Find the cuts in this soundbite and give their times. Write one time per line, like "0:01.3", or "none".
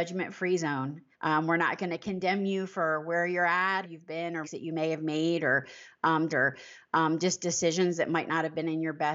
0:01.1
0:03.8
0:04.4
0:06.3